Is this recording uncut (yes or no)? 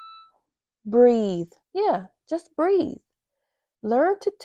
no